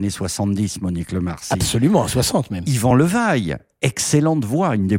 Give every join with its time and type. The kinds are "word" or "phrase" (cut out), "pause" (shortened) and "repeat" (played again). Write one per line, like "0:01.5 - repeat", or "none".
none